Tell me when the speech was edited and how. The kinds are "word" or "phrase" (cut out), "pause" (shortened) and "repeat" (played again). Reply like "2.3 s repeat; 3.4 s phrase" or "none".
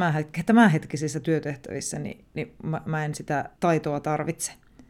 3.5 s pause